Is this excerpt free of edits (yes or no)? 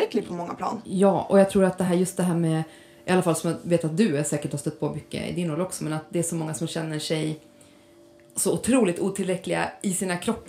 yes